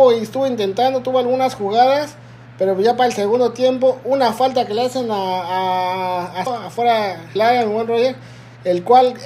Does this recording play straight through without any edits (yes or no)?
no